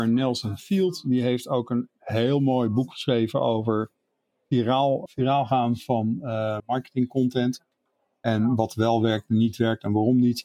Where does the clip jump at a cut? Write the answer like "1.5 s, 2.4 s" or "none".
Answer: 5.1 s, 6.6 s